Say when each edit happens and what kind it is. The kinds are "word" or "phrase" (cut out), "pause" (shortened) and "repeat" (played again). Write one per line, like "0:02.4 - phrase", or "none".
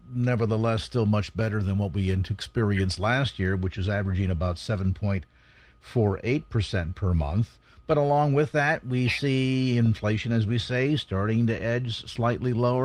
none